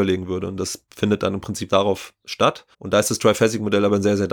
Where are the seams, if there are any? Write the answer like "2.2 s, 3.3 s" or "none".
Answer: 1.7 s, 2.7 s

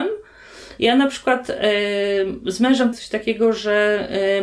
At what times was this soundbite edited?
2.9 s

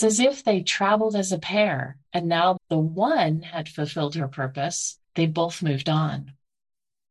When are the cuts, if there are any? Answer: 2.1 s, 2.6 s, 5.0 s

